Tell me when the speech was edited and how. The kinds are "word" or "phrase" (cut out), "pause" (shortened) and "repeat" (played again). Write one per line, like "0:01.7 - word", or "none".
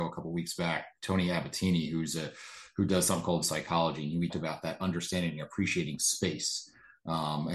0:03.4 - word
0:04.3 - word